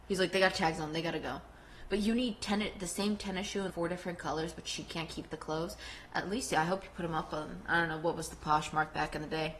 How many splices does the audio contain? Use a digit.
1